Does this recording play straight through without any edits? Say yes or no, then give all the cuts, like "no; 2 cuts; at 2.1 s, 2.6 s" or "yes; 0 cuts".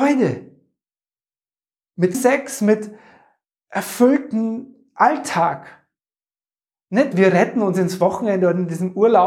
no; 2 cuts; at 2.1 s, 7.1 s